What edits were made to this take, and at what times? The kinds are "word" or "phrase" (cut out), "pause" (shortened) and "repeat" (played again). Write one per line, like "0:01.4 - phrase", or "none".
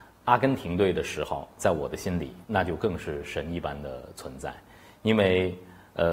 0:02.4 - pause